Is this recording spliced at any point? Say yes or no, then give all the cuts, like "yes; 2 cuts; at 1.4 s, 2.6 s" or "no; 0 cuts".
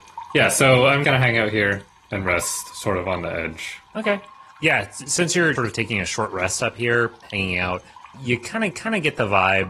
yes; 4 cuts; at 1.0 s, 5.5 s, 8.1 s, 8.7 s